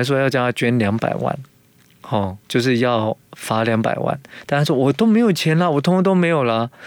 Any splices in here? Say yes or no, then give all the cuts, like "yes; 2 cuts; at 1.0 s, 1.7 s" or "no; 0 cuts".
yes; 2 cuts; at 2.4 s, 3.2 s